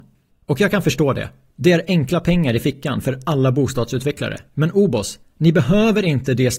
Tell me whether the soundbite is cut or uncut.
uncut